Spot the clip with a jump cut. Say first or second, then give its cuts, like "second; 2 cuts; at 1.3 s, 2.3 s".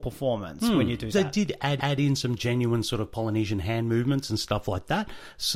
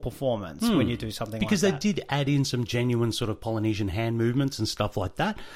first; 2 cuts; at 1.1 s, 1.8 s